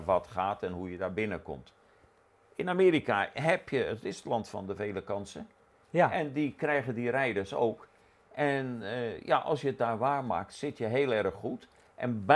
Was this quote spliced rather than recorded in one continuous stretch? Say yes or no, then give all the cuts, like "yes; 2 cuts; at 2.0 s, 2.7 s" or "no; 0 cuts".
no; 0 cuts